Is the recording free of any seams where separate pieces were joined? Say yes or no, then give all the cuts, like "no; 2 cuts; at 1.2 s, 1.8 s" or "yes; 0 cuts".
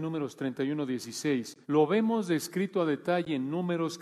no; 1 cut; at 1.6 s